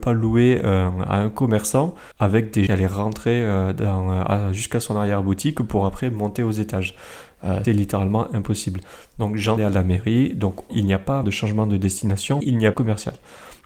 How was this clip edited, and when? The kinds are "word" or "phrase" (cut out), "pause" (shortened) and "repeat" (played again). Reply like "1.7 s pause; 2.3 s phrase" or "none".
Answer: 2.1 s pause; 2.7 s phrase; 7.6 s word; 9.6 s phrase; 10.7 s word; 11.2 s word; 12.4 s word; 12.7 s phrase